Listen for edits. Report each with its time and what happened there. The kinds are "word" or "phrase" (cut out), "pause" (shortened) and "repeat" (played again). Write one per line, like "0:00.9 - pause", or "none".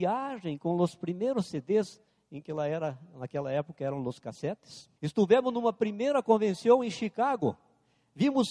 0:02.1 - pause
0:05.0 - pause